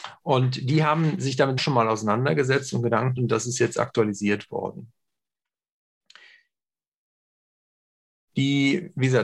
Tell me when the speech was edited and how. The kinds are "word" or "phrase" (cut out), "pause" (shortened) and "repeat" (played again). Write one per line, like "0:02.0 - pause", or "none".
0:01.6 - word
0:03.2 - word